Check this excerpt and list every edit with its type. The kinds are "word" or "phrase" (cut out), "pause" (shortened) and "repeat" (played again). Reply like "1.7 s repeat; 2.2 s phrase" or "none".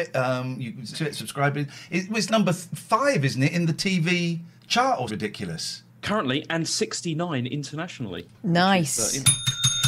0.9 s word; 2.3 s word; 4.6 s pause; 5.1 s word